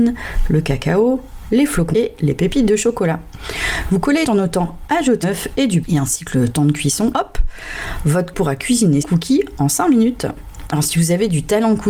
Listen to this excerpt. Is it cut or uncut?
cut